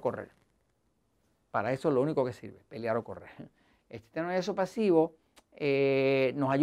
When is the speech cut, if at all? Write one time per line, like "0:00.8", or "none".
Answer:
none